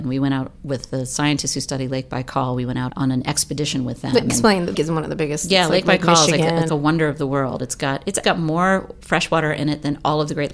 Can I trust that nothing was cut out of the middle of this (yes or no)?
no